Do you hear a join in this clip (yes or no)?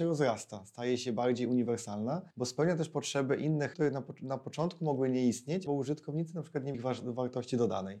yes